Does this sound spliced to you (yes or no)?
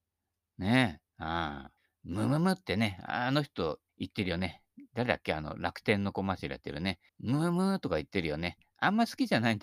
yes